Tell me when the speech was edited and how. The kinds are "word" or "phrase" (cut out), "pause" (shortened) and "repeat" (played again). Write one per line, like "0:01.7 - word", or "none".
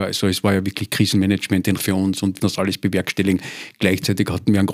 0:01.8 - word
0:02.4 - word